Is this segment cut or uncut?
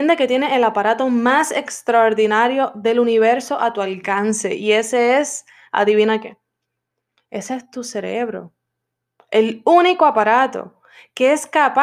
uncut